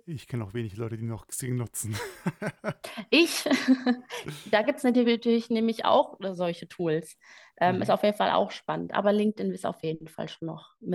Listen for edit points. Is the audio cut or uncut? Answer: uncut